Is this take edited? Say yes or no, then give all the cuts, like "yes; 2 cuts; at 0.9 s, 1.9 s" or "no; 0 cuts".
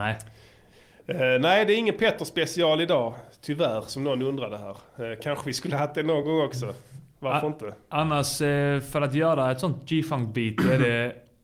no; 0 cuts